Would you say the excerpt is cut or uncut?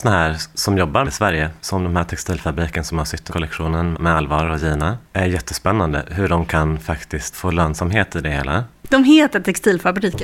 cut